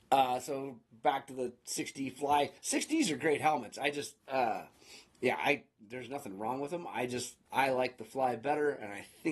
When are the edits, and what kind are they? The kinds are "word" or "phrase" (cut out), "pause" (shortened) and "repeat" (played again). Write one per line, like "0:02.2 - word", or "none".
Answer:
0:02.6 - pause
0:04.2 - pause
0:07.5 - pause